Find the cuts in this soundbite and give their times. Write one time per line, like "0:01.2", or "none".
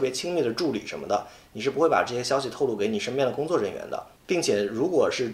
0:04.1